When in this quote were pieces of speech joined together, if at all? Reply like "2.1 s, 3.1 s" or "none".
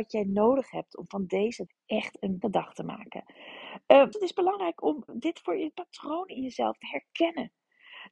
1.7 s, 2.4 s, 4.1 s, 5.1 s, 5.7 s, 6.8 s